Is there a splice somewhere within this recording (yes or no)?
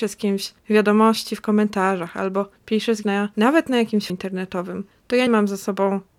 yes